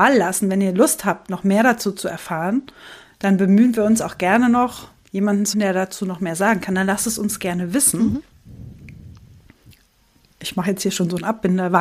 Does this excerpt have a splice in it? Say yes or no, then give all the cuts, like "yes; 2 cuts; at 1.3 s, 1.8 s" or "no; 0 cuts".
yes; 1 cut; at 5.5 s